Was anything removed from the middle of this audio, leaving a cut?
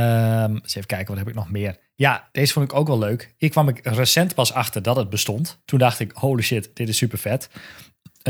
no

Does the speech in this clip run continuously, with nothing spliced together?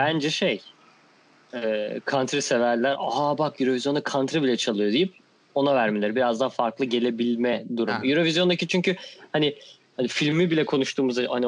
yes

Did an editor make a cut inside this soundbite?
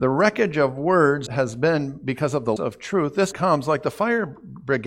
yes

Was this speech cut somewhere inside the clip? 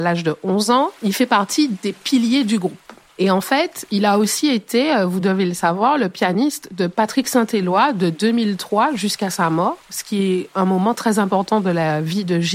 no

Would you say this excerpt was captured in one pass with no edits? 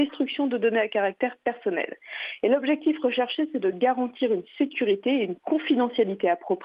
yes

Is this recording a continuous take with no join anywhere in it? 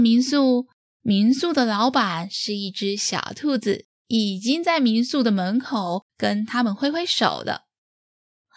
no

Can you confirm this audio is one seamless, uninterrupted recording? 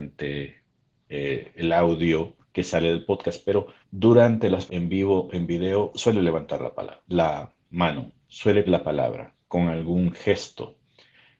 no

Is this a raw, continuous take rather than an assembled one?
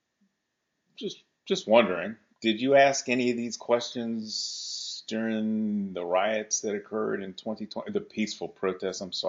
no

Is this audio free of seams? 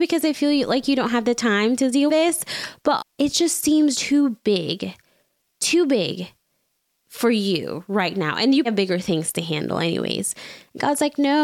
no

